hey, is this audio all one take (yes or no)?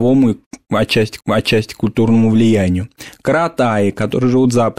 no